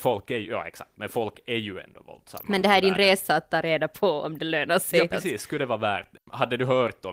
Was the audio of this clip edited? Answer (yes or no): no